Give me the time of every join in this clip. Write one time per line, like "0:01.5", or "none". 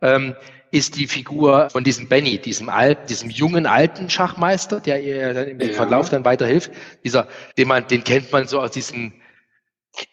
0:01.7
0:03.1
0:07.5